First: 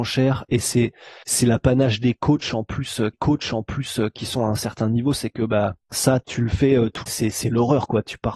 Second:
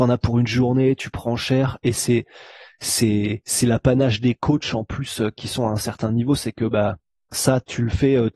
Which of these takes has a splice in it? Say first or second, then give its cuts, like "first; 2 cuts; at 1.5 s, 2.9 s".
first; 4 cuts; at 1.2 s, 3.1 s, 5.8 s, 7.1 s